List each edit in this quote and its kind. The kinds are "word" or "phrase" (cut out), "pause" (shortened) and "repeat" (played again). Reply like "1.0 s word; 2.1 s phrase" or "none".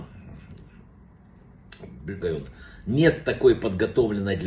2.2 s phrase